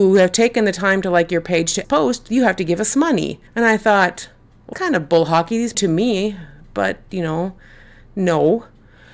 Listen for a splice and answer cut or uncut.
cut